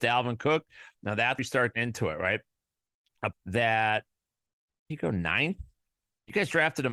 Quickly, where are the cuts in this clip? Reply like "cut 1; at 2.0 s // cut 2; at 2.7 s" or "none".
cut 1; at 1.4 s // cut 2; at 1.7 s // cut 3; at 3.3 s // cut 4; at 4.9 s